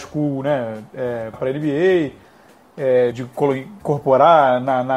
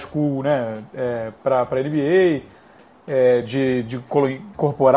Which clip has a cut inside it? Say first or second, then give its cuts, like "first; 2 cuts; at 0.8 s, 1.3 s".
first; 2 cuts; at 1.3 s, 3.1 s